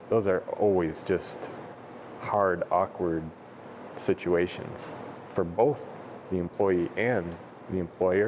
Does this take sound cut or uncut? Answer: uncut